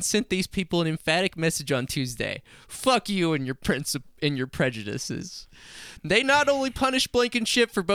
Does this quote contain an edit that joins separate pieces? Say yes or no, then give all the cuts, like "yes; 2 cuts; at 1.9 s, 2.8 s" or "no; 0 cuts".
no; 0 cuts